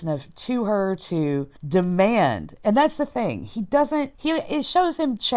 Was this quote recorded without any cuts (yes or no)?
no